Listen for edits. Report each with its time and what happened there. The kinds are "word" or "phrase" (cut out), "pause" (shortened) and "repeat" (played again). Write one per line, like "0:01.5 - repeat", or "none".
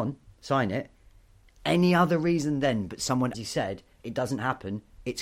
0:03.3 - phrase